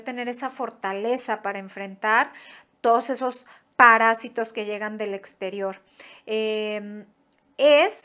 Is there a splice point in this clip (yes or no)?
no